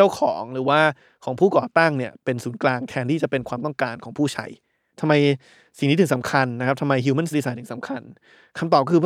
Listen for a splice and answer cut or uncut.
cut